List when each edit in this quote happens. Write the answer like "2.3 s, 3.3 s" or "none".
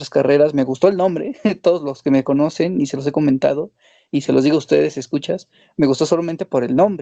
none